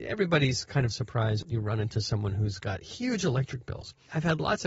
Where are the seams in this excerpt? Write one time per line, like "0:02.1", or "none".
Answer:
none